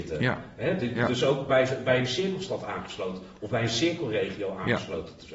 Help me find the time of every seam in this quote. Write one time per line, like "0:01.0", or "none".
none